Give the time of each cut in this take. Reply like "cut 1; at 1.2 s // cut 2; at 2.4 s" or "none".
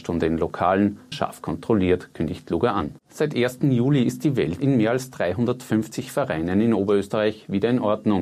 cut 1; at 1.1 s // cut 2; at 3.0 s // cut 3; at 4.6 s